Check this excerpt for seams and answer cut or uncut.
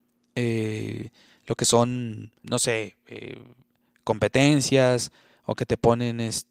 cut